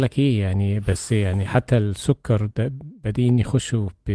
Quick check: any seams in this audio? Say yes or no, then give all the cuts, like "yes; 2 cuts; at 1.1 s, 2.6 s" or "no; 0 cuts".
yes; 1 cut; at 1.5 s